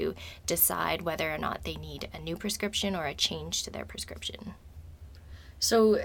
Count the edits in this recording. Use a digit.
0